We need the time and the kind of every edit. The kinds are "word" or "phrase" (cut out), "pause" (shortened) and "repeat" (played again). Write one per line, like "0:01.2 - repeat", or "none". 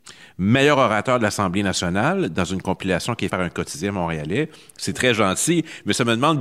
0:03.3 - word